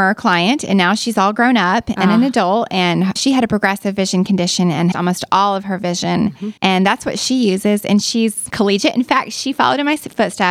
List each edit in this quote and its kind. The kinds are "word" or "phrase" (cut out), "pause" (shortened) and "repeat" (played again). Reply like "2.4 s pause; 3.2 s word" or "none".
3.2 s word; 4.9 s phrase; 6.6 s pause